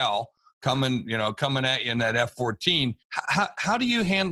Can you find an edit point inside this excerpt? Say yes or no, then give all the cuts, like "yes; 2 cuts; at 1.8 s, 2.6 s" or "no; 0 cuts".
yes; 1 cut; at 3.0 s